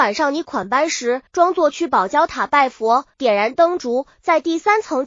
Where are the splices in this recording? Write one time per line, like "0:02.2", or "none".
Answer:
0:01.3
0:03.1